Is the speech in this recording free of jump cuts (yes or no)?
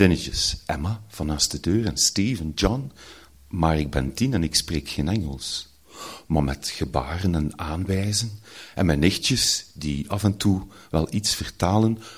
yes